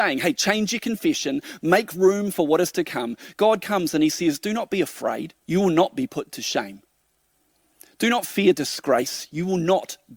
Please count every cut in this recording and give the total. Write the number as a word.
one